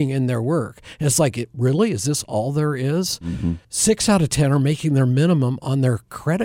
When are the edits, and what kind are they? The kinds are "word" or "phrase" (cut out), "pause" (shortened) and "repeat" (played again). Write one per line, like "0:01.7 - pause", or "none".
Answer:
0:03.6 - pause